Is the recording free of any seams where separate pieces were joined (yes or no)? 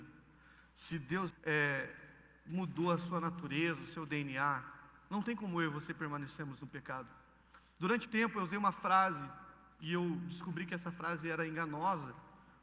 no